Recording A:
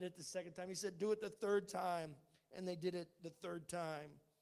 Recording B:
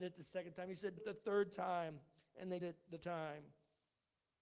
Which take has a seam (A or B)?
B